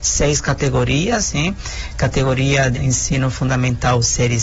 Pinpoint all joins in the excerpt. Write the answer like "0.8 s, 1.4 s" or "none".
2.7 s